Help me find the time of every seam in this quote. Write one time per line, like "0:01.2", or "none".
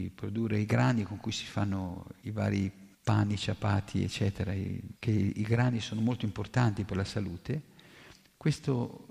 0:02.2
0:02.9
0:05.0